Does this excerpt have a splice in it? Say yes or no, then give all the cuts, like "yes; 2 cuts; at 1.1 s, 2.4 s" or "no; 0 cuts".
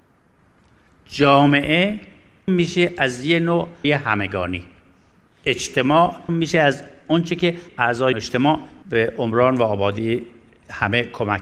yes; 6 cuts; at 2.5 s, 3.8 s, 6.3 s, 7.7 s, 8.1 s, 8.8 s